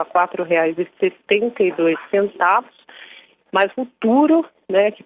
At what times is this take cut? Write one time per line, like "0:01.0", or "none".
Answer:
0:03.7

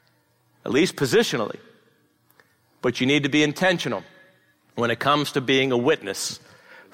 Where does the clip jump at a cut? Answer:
none

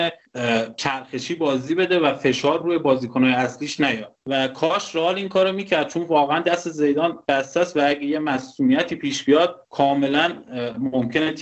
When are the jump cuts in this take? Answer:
none

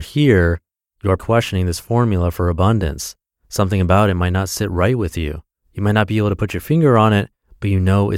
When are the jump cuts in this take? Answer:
0:01.2

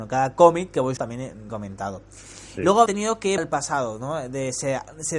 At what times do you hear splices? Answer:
0:01.0
0:01.5
0:02.9
0:03.4

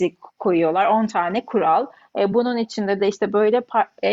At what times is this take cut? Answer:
none

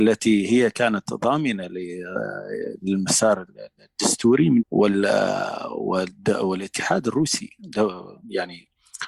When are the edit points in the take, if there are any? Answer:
0:04.6

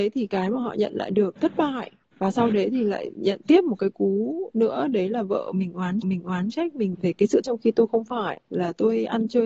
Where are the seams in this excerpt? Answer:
0:01.4
0:06.0
0:06.9
0:07.4

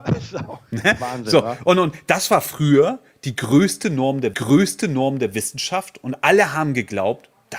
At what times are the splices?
0:04.3

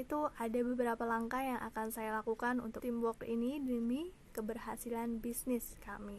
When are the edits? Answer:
0:02.8

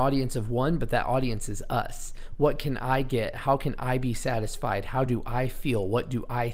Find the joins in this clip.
none

